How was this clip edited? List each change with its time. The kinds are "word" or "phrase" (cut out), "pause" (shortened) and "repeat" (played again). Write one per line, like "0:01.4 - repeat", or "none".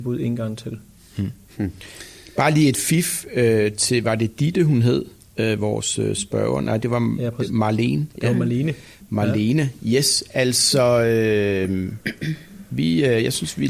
none

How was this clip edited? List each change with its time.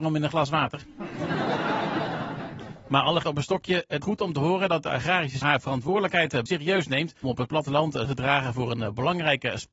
0:03.2 - word
0:04.0 - word
0:05.4 - word
0:06.5 - word
0:07.2 - word
0:08.0 - word

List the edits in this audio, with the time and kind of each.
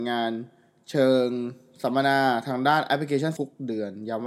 0:03.4 - word

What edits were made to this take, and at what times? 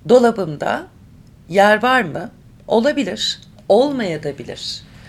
none

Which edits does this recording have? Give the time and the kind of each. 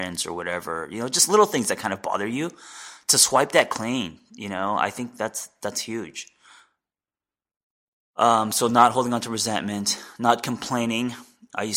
none

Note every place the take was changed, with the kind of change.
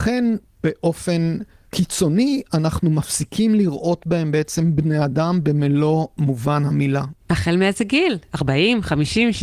none

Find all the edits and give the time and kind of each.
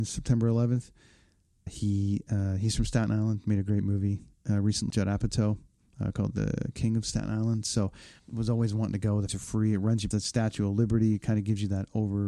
0:01.7 - word
0:04.9 - word
0:08.2 - word
0:09.3 - word
0:10.1 - word

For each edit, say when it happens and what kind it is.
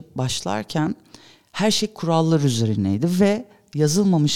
none

